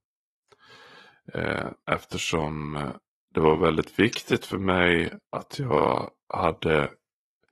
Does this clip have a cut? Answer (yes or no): yes